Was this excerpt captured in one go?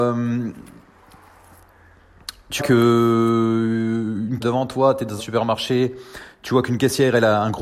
no; 3 cuts; at 2.6 s, 4.4 s, 5.2 s

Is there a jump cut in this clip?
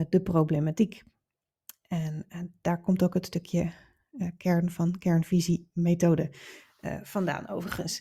no; 0 cuts

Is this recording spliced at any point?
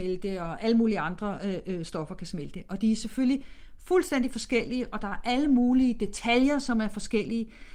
no; 0 cuts

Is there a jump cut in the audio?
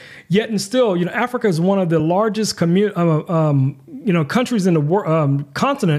no; 0 cuts

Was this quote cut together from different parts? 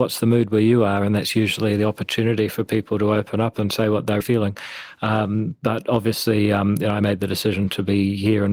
yes; 1 cut; at 4.2 s

